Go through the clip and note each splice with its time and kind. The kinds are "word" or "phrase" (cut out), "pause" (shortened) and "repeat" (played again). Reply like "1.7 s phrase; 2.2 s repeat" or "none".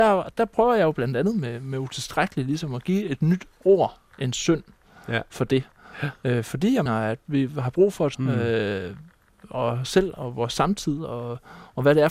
6.9 s word; 8.1 s phrase; 9.2 s pause

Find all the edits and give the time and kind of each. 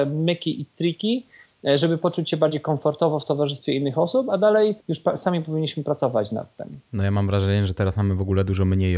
4.8 s pause; 6.9 s pause

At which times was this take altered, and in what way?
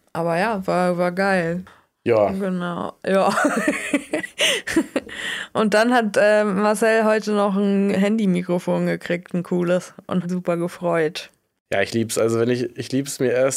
10.2 s phrase

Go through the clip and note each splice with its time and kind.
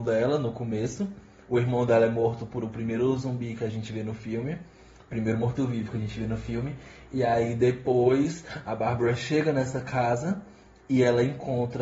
none

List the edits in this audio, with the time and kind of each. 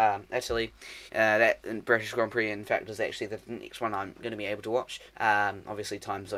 1.1 s pause; 5.1 s pause

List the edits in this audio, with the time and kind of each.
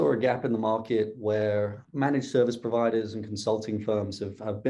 1.8 s word

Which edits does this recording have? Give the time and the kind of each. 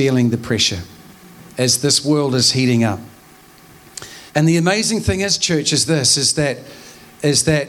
1.5 s pause; 4.3 s pause

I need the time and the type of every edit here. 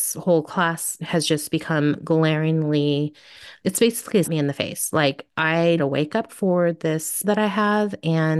1.0 s word; 3.6 s word; 4.2 s word; 5.8 s word; 6.3 s word; 7.2 s word

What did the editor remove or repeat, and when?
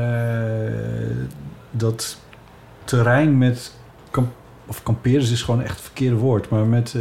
none

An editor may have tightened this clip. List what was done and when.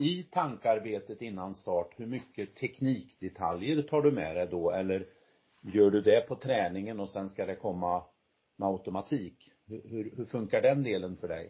none

